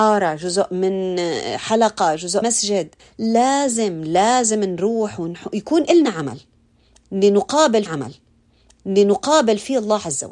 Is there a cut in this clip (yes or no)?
yes